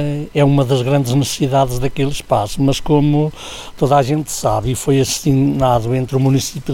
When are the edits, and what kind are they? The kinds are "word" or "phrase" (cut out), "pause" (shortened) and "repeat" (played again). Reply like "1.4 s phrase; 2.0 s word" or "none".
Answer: none